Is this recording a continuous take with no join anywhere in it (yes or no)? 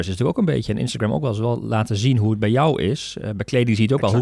yes